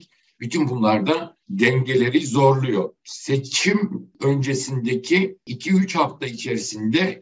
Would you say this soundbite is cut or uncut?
cut